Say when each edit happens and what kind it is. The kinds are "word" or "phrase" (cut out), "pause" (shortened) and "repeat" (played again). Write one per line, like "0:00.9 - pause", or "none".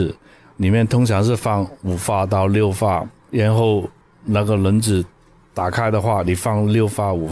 0:04.0 - pause